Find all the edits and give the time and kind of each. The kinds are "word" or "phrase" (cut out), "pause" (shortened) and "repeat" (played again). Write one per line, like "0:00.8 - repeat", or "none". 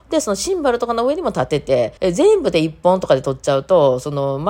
0:02.0 - pause